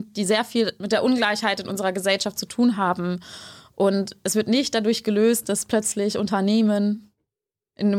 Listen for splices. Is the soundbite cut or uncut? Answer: uncut